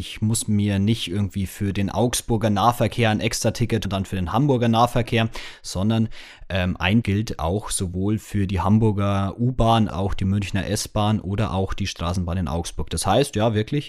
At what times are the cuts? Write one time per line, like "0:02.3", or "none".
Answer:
0:03.8
0:07.0
0:09.9